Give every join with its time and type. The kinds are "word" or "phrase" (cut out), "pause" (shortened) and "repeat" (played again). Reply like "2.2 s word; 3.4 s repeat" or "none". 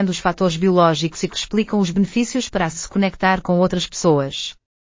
1.3 s word; 2.7 s word